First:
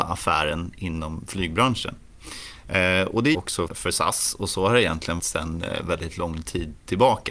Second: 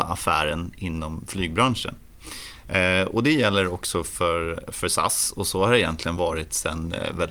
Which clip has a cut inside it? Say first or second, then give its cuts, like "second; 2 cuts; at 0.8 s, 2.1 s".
first; 3 cuts; at 3.3 s, 3.7 s, 5.2 s